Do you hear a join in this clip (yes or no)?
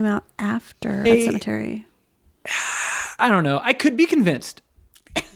yes